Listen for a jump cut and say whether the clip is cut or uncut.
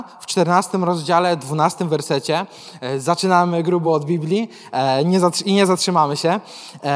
uncut